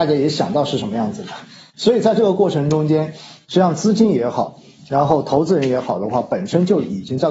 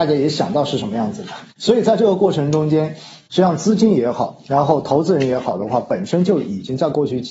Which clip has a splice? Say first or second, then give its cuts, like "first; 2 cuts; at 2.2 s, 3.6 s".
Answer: second; 2 cuts; at 1.5 s, 4.4 s